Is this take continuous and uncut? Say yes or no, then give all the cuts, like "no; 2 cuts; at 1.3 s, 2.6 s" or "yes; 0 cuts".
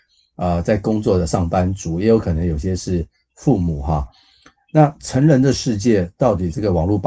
yes; 0 cuts